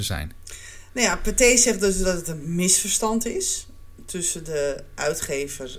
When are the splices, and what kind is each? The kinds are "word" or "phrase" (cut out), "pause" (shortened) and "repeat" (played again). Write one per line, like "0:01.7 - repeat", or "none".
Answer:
none